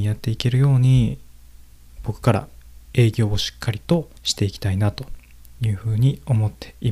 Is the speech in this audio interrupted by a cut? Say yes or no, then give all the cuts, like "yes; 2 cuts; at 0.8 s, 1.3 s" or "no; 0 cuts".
yes; 2 cuts; at 1.7 s, 4.2 s